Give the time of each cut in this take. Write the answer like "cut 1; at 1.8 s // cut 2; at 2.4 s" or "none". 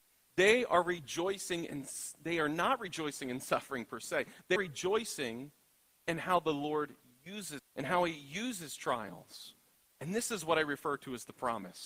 cut 1; at 4.6 s // cut 2; at 7.6 s